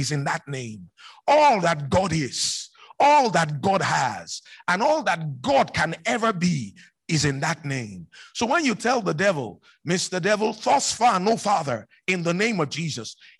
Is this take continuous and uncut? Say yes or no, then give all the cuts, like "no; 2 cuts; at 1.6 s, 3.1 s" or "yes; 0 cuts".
yes; 0 cuts